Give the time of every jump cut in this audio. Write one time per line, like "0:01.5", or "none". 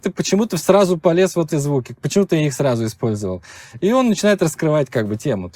0:01.5